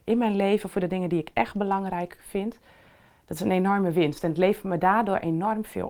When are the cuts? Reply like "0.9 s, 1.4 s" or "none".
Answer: none